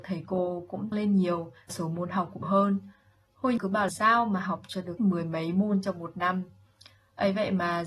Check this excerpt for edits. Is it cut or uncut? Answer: cut